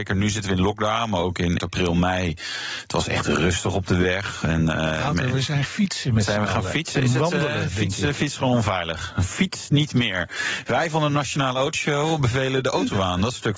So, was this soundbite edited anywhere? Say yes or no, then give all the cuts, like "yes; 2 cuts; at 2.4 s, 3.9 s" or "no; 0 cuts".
yes; 2 cuts; at 1.6 s, 5.7 s